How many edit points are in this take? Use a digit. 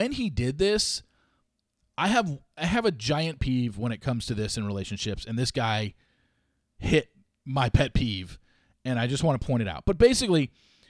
1